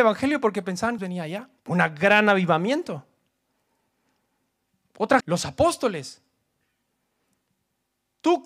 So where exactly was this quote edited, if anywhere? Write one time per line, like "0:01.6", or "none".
0:01.0
0:01.6
0:05.2